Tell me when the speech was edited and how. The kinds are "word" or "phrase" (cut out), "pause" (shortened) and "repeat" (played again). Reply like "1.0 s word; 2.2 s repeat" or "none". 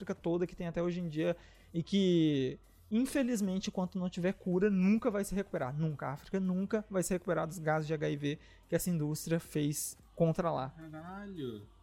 none